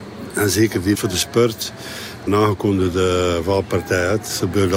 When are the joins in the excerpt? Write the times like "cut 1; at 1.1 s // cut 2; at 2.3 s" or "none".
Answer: cut 1; at 0.9 s // cut 2; at 2.3 s